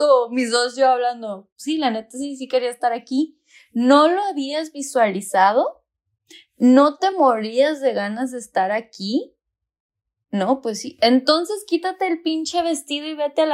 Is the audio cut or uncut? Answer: uncut